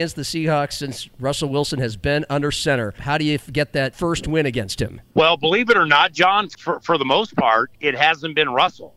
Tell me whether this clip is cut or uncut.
uncut